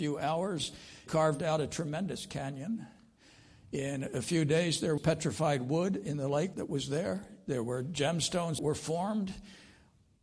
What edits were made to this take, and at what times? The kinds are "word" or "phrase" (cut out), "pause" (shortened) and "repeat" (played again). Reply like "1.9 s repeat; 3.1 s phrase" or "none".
1.1 s word; 5.0 s word; 6.5 s word; 8.6 s word